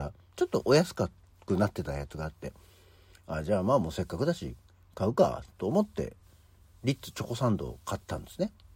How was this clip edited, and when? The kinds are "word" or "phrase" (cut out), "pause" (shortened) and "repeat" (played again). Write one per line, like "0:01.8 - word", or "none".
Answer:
none